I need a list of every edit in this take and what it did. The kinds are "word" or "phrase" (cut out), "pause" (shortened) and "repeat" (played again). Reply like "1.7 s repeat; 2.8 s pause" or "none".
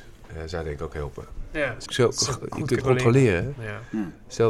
1.9 s word; 2.8 s word